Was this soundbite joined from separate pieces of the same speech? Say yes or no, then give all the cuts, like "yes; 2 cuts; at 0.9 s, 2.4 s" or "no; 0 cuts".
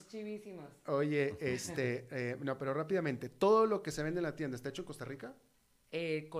no; 0 cuts